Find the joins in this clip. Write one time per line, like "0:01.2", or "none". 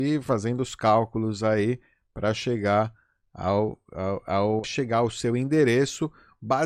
0:04.6